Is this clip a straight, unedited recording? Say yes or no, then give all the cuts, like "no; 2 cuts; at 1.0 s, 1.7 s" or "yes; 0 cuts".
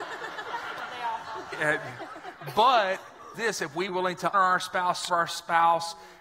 no; 5 cuts; at 1.5 s, 3.3 s, 3.9 s, 4.3 s, 5.1 s